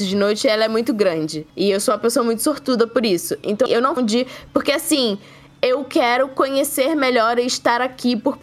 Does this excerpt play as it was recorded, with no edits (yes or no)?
no